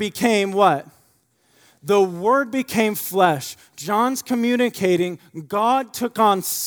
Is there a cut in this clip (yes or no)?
no